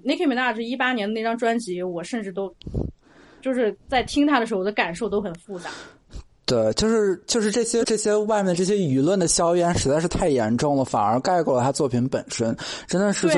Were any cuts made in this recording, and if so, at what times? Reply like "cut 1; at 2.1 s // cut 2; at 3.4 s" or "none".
cut 1; at 7.8 s